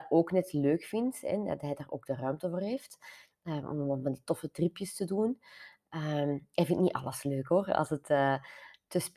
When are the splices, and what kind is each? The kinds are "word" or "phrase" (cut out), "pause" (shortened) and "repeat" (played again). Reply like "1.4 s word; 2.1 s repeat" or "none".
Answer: none